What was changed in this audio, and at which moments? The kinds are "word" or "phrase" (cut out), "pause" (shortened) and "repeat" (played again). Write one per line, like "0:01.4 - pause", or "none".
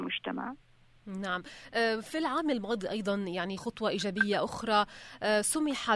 0:03.6 - word